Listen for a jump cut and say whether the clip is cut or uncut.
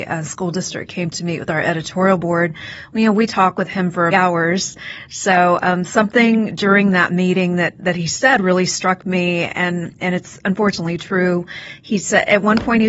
cut